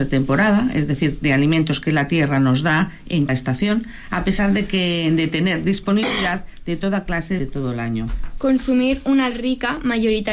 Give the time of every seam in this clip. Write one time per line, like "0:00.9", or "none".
0:03.3
0:07.4
0:09.3